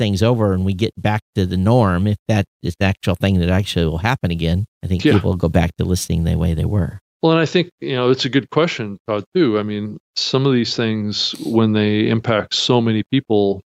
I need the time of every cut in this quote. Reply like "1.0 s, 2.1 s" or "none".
2.5 s, 4.7 s, 7.1 s, 10.0 s